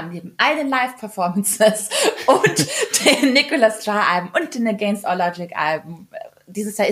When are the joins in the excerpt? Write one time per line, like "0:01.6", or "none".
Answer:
none